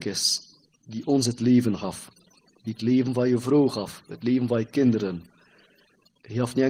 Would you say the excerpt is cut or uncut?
uncut